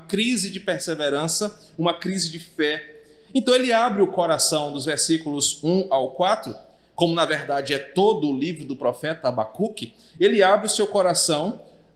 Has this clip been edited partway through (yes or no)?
no